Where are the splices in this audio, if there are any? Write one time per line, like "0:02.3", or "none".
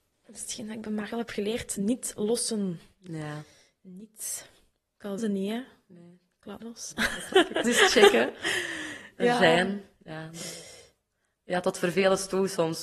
0:01.1
0:05.2
0:06.6
0:07.6